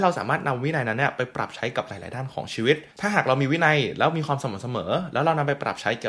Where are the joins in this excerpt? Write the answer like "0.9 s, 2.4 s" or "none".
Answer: 2.9 s